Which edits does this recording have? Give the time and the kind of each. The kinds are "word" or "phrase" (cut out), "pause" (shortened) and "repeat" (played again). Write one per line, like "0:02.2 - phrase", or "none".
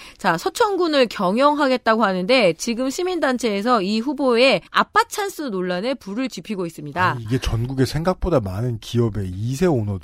0:04.7 - pause